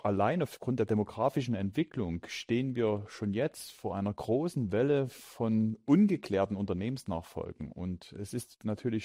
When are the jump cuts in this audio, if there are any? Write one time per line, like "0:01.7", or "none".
none